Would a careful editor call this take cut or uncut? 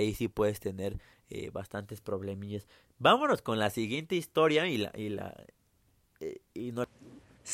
uncut